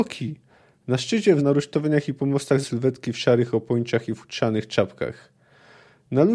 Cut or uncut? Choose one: cut